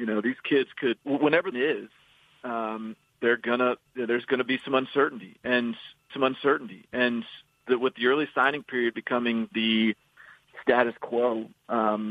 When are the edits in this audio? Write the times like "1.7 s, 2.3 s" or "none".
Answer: 1.0 s, 1.5 s, 3.9 s, 6.1 s